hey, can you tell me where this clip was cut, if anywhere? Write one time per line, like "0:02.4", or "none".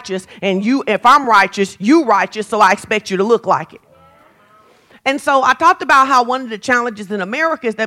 none